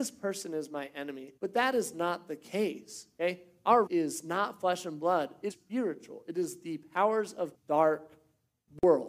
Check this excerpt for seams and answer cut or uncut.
cut